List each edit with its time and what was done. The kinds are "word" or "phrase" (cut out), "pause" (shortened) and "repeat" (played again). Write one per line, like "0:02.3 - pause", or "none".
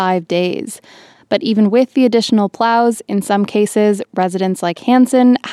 none